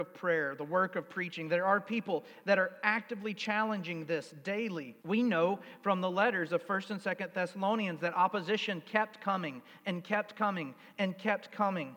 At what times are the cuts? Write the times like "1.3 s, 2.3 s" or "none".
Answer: 5.0 s